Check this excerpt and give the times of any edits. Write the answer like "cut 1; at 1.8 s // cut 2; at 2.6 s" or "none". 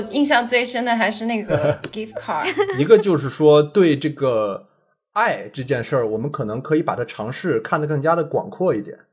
none